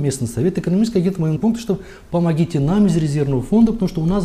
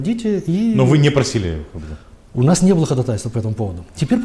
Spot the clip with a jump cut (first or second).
first